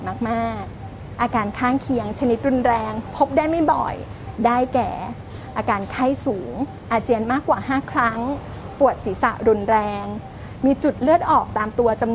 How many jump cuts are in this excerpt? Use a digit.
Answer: 1